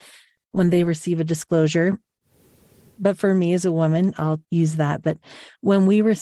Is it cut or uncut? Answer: cut